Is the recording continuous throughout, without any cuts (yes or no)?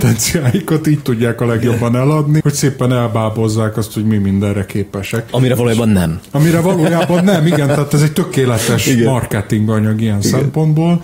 no